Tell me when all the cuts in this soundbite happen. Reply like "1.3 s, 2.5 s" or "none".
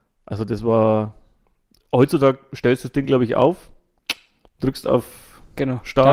none